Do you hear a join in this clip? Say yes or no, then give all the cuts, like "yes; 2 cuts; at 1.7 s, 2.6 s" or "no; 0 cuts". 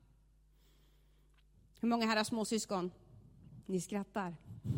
yes; 1 cut; at 3.6 s